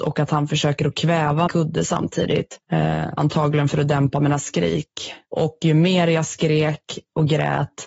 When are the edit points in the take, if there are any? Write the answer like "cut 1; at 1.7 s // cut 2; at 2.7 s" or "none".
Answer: cut 1; at 1.5 s // cut 2; at 2.6 s // cut 3; at 5.2 s